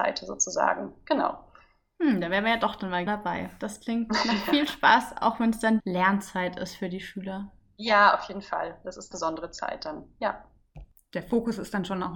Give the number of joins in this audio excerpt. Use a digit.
3